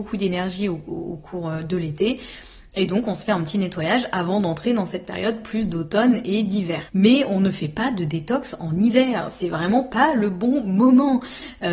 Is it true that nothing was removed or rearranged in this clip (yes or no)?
yes